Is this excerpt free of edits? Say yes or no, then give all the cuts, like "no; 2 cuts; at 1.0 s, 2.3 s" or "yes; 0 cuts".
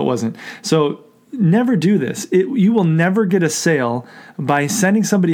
yes; 0 cuts